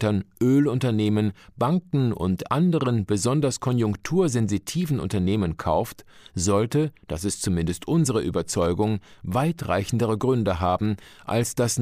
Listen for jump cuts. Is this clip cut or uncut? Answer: uncut